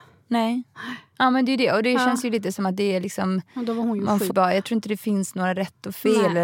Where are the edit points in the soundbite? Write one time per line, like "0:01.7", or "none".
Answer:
0:04.3